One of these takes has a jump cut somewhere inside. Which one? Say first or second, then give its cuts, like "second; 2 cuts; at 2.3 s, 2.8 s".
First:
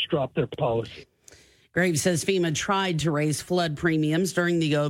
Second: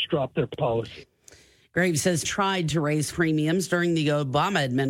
second; 2 cuts; at 2.2 s, 3.1 s